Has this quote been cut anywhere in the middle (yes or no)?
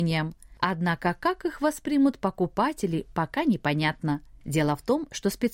no